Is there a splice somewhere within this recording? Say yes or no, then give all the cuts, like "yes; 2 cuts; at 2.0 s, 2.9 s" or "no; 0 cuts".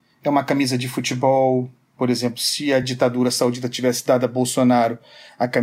no; 0 cuts